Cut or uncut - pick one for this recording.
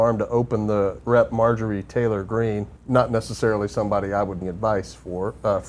cut